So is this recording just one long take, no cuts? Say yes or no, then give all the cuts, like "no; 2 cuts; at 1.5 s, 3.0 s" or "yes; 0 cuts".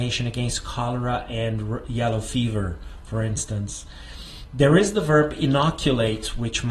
yes; 0 cuts